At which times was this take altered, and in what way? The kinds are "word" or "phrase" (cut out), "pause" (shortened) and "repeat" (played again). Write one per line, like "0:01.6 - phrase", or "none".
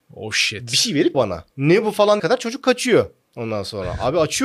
0:01.1 - word
0:01.5 - pause
0:02.2 - word